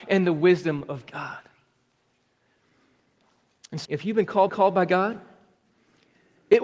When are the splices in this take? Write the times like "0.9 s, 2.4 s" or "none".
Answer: 3.8 s, 4.5 s